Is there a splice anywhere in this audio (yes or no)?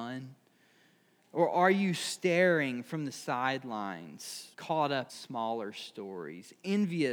yes